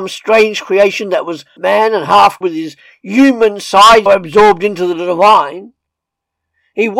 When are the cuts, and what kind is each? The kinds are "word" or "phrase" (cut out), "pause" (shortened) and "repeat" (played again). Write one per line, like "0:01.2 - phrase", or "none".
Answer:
0:01.6 - word
0:02.4 - word
0:04.1 - word

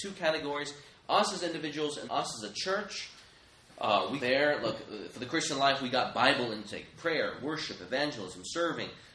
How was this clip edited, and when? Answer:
0:02.1 - word
0:04.2 - word

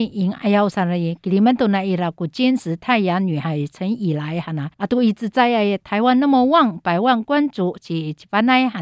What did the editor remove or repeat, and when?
0:04.7 - pause

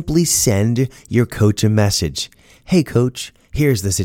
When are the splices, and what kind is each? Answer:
none

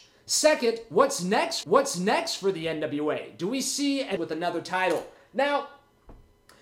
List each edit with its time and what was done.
0:01.6 - repeat
0:04.2 - word

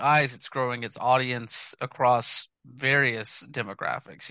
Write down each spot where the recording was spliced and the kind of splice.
0:02.5 - pause

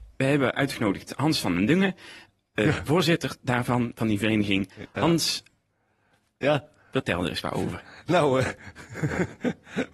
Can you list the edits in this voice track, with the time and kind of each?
none

